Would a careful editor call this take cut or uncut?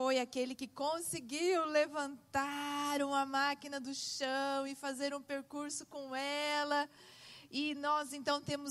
uncut